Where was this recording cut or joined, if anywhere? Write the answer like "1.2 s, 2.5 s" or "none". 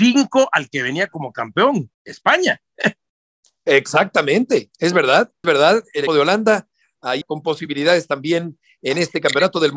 1.9 s, 5.4 s, 6.1 s, 7.2 s